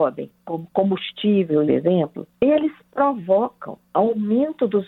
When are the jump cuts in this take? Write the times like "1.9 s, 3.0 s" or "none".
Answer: 1.7 s